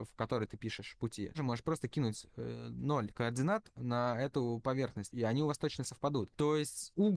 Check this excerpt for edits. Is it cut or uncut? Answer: cut